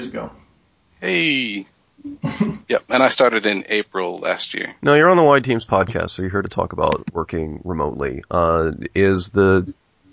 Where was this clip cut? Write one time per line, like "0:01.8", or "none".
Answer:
0:02.6
0:04.8

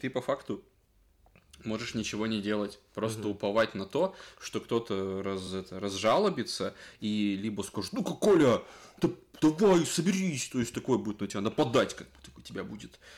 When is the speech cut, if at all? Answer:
none

